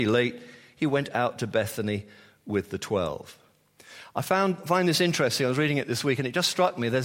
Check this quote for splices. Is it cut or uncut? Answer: uncut